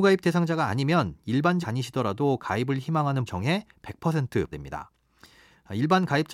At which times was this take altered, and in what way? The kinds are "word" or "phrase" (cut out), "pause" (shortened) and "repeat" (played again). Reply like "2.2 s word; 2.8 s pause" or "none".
1.6 s word; 3.3 s word; 4.5 s phrase